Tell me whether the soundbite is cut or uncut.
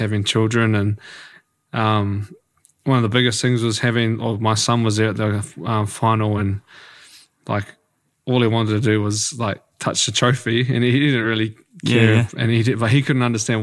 uncut